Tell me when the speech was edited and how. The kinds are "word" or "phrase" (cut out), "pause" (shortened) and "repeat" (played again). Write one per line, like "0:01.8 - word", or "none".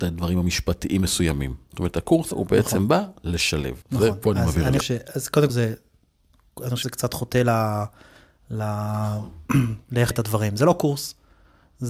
0:02.3 - word
0:03.8 - pause
0:04.8 - word
0:05.5 - word
0:06.8 - word
0:10.1 - word